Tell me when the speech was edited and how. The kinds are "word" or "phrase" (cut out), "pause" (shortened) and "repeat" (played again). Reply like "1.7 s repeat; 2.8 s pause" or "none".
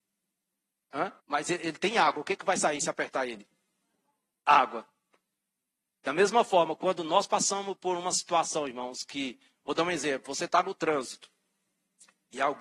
1.2 s pause